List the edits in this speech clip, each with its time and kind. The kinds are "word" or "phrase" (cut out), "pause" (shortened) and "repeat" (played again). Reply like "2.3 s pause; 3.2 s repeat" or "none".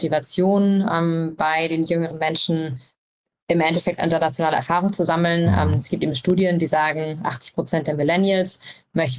none

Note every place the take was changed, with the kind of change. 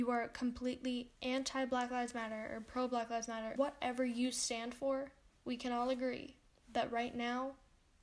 1.2 s pause; 3.6 s word; 5.2 s pause; 6.5 s pause

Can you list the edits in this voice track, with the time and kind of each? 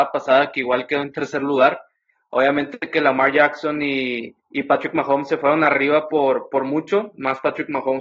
4.4 s pause

